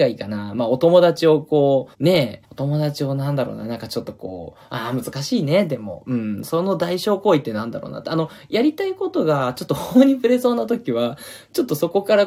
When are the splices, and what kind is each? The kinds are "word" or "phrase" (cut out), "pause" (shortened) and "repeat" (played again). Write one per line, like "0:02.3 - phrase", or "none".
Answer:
0:01.9 - pause
0:02.4 - pause
0:04.6 - pause

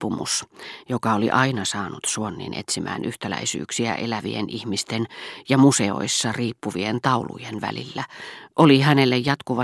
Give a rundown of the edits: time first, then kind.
none

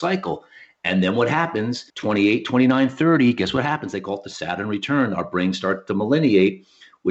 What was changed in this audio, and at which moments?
0:01.9 - pause

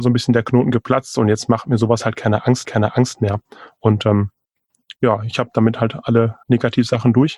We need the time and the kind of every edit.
0:02.6 - repeat
0:05.0 - pause
0:06.4 - pause

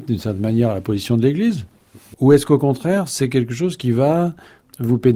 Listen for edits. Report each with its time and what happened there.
none

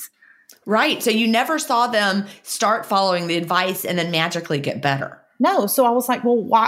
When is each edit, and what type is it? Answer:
none

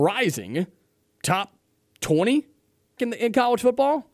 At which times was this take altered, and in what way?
0:03.0 - word

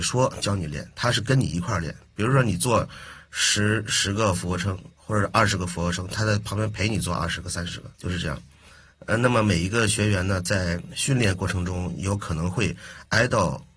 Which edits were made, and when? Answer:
0:07.9 - pause

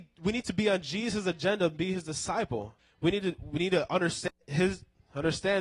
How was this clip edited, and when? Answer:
0:02.8 - pause
0:04.4 - pause

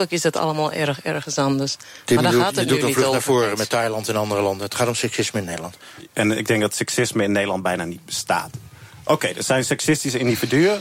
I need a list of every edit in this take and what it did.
none

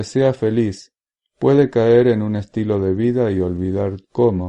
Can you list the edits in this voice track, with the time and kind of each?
none

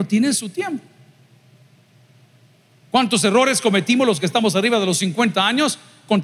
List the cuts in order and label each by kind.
none

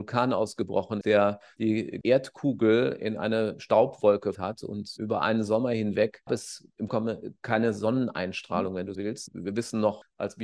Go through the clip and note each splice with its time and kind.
0:01.0 - word
0:02.0 - word
0:04.3 - word
0:06.3 - word
0:06.9 - word
0:08.9 - word

